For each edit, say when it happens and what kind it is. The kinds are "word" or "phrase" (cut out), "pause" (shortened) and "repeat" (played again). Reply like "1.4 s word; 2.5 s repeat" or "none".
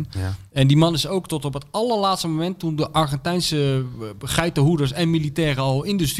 none